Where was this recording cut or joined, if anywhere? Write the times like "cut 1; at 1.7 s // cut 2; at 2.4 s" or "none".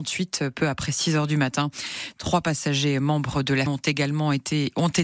cut 1; at 3.7 s